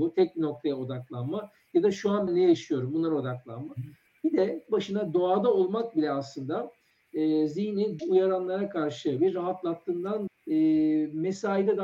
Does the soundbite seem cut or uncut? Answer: cut